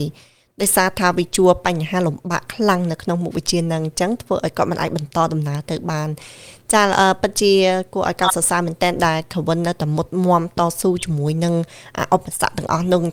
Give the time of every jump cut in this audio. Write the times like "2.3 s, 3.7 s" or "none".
none